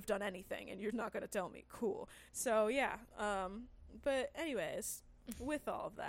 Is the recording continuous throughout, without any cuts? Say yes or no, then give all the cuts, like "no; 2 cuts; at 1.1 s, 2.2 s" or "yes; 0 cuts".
no; 2 cuts; at 0.9 s, 2.3 s